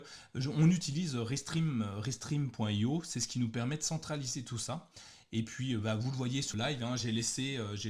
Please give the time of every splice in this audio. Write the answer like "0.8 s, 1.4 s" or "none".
6.5 s